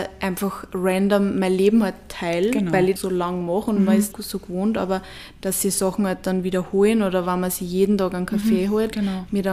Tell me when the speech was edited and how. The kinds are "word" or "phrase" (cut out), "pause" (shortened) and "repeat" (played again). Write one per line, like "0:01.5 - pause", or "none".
0:03.0 - phrase
0:04.1 - phrase